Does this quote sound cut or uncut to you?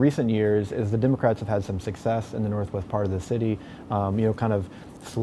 uncut